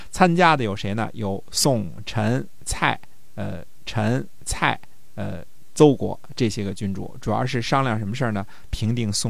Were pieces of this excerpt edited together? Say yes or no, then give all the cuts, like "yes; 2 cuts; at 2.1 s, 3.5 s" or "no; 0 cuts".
yes; 1 cut; at 3.9 s